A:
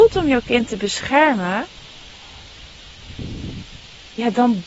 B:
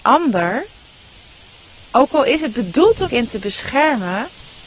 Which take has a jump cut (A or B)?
B